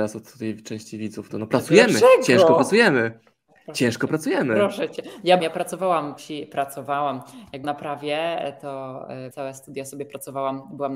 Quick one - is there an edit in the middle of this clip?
yes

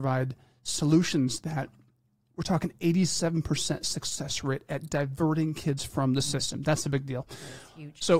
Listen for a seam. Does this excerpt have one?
no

